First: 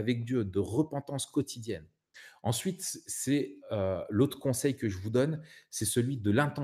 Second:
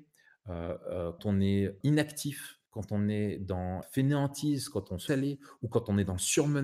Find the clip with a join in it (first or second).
second